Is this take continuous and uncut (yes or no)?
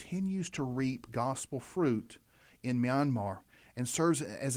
yes